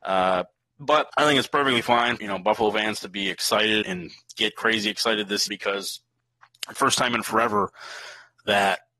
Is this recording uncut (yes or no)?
no